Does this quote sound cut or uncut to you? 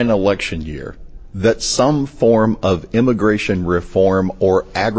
uncut